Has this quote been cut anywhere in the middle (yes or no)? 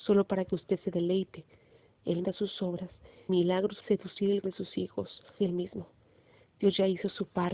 yes